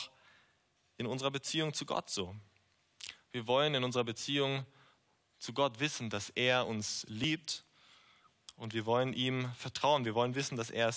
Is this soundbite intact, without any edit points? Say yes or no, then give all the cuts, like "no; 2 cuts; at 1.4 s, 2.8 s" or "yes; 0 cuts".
yes; 0 cuts